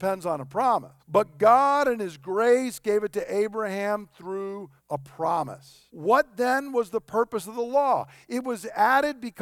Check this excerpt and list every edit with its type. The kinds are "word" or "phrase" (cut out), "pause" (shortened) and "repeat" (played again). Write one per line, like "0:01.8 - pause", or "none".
0:01.0 - pause
0:04.8 - pause
0:05.9 - pause